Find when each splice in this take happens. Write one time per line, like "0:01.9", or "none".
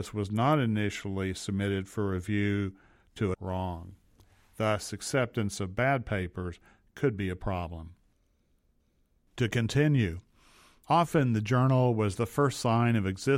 0:03.3

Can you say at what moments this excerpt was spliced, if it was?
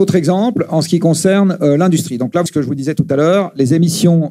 0:02.5

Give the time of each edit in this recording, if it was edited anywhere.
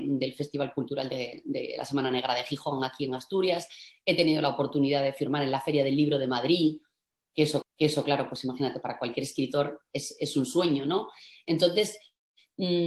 0:07.6

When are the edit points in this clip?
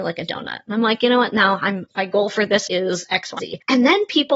0:01.9
0:02.7
0:03.4

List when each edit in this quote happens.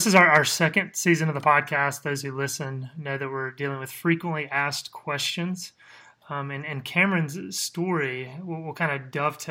none

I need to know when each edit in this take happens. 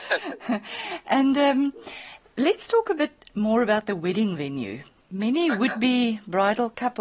0:05.0

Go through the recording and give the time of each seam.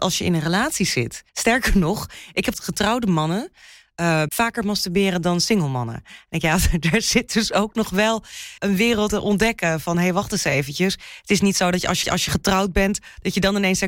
0:01.3
0:02.5
0:04.3
0:08.6
0:09.1
0:12.0

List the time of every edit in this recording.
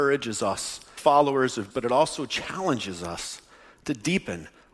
0:01.0
0:01.7

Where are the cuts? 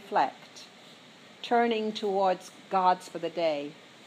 0:03.1

